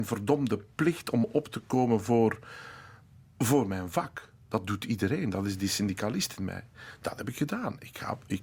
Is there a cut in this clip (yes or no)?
no